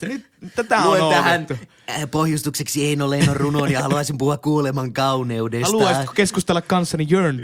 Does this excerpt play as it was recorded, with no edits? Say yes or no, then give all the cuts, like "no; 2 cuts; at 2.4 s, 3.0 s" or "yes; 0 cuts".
yes; 0 cuts